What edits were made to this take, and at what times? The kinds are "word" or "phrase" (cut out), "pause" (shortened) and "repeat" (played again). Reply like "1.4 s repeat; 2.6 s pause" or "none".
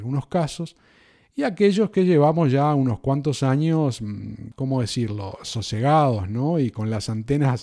none